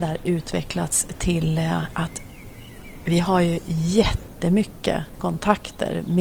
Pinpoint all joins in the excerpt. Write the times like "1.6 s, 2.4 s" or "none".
none